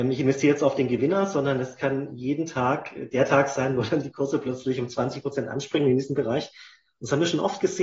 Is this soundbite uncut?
yes; 0 cuts

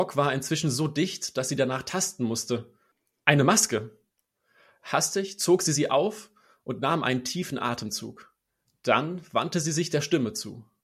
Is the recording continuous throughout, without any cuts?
yes; 0 cuts

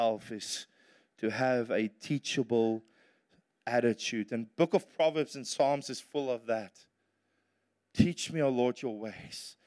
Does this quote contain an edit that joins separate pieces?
no; 0 cuts

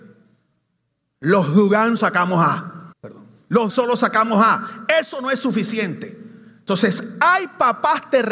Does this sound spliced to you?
yes; 3 cuts; at 2.0 s, 2.9 s, 3.7 s

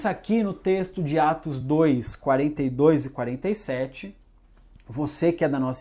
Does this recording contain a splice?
no; 0 cuts

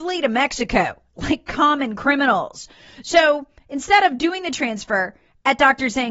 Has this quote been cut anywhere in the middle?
no; 0 cuts

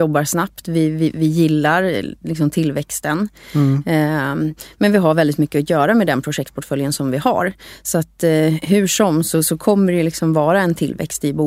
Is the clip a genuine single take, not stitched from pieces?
yes; 0 cuts

